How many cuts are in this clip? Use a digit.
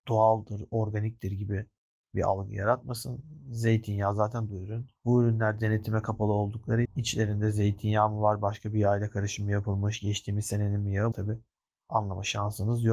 4